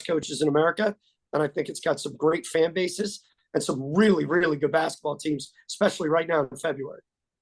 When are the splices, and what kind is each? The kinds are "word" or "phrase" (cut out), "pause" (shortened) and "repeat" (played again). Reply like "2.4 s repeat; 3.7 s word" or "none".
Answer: none

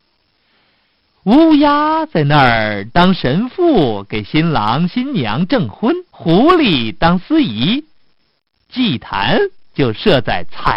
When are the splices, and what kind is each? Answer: 6.1 s pause

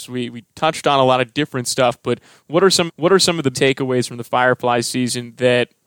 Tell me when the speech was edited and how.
2.9 s repeat; 3.5 s word

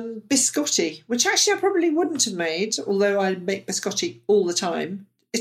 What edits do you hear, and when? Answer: none

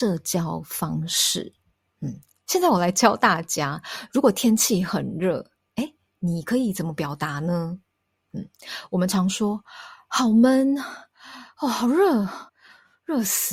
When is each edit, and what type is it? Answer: 12.5 s pause

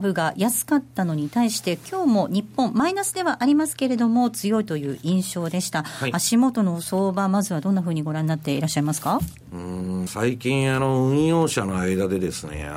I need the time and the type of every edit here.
10.1 s phrase

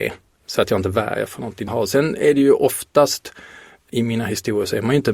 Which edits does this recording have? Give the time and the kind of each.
1.7 s phrase

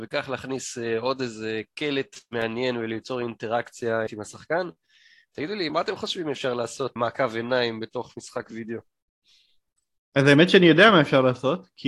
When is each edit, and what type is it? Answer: 4.1 s word; 5.7 s word; 7.0 s word

